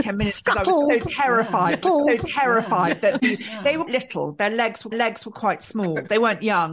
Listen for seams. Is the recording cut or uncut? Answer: cut